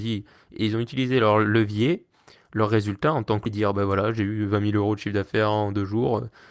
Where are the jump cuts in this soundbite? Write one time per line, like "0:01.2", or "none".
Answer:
0:03.5

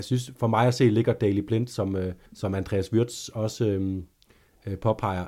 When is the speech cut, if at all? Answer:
0:02.3

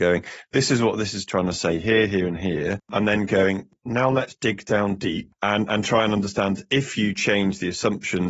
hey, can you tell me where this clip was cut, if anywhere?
none

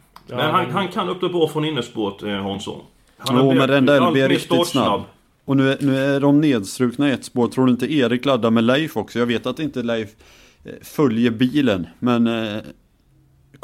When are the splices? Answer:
none

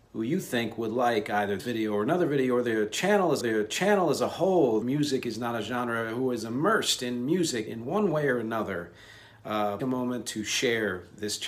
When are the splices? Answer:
0:01.6
0:03.4
0:04.8
0:07.7
0:09.8

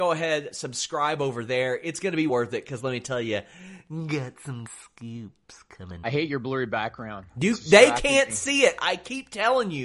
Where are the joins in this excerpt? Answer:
0:02.3
0:04.7
0:06.0

